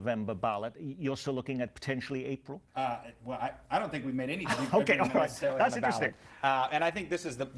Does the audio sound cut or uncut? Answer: cut